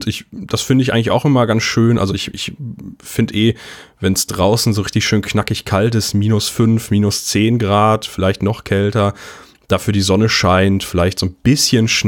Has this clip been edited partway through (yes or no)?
no